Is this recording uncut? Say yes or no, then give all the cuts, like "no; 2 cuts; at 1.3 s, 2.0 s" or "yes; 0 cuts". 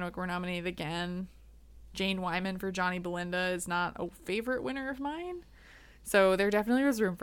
yes; 0 cuts